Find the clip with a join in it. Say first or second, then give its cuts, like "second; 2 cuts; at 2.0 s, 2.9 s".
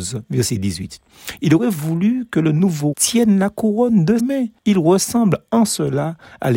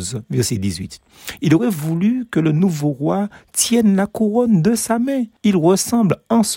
first; 2 cuts; at 2.9 s, 4.2 s